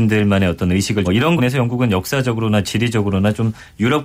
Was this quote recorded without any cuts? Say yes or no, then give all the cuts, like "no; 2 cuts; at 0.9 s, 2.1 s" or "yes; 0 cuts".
no; 2 cuts; at 1.0 s, 1.4 s